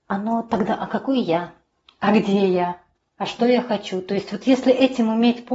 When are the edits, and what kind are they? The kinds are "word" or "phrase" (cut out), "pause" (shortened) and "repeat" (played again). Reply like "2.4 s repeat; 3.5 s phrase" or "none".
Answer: none